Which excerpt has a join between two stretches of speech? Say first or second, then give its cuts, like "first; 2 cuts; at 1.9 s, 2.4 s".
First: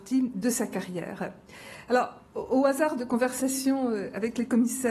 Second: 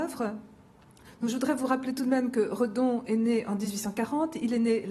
first; 1 cut; at 2.2 s